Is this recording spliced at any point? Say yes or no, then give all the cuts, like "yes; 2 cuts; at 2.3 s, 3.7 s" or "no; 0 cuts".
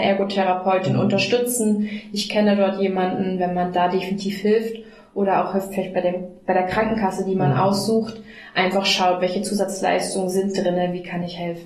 no; 0 cuts